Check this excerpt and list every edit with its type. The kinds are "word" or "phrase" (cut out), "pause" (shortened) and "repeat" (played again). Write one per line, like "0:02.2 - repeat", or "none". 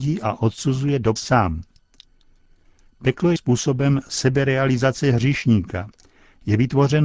0:01.2 - word
0:03.4 - word